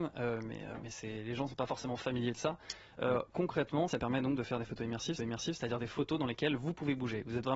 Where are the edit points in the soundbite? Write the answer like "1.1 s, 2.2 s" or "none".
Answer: 3.9 s, 5.2 s